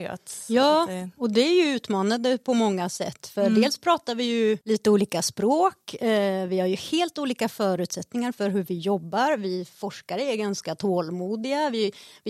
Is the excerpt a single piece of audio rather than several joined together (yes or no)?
no